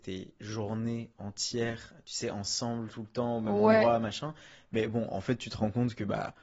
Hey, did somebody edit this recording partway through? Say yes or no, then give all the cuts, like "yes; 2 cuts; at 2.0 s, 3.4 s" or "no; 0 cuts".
no; 0 cuts